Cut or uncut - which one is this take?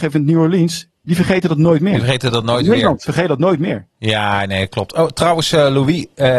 cut